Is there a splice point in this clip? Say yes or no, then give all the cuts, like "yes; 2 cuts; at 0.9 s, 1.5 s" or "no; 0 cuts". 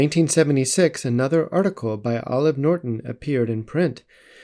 no; 0 cuts